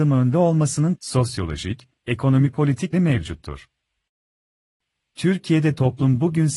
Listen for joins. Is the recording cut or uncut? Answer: cut